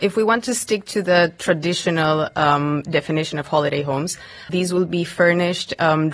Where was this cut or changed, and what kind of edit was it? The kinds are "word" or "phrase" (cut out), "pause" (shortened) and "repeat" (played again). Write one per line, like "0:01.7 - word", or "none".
0:04.5 - word